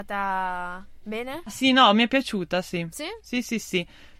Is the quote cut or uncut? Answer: uncut